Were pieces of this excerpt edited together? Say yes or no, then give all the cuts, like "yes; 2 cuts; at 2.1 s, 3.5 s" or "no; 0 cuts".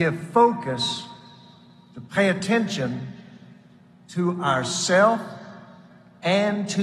no; 0 cuts